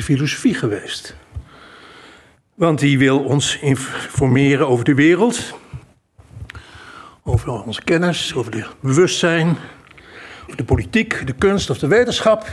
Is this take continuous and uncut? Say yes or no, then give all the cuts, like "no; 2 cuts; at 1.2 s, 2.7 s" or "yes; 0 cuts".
yes; 0 cuts